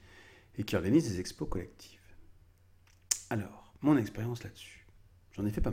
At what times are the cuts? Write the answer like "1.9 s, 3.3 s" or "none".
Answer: 3.8 s